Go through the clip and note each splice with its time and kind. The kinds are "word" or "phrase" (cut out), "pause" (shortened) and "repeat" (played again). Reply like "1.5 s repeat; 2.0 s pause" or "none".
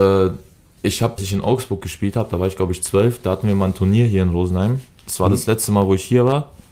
1.2 s phrase